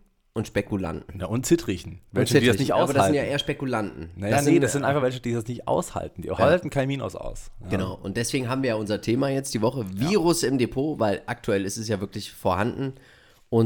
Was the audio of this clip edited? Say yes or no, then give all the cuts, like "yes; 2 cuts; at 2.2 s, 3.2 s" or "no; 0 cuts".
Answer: no; 0 cuts